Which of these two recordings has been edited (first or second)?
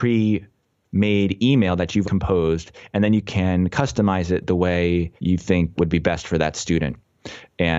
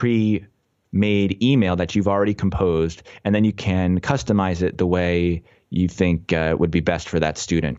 first